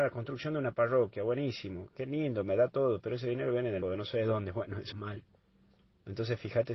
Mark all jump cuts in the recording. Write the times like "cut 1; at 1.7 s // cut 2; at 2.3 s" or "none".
cut 1; at 3.8 s // cut 2; at 4.9 s